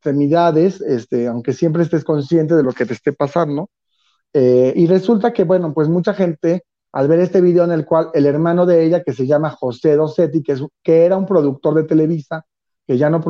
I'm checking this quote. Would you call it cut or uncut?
uncut